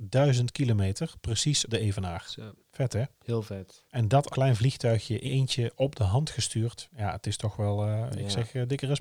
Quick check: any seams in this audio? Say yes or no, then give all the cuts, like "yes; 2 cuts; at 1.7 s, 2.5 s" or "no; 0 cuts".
yes; 5 cuts; at 1.7 s, 2.6 s, 3.9 s, 4.3 s, 5.3 s